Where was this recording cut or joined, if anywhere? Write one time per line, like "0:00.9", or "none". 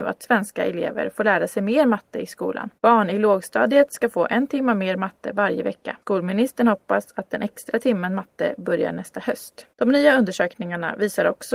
0:02.8
0:06.0
0:09.7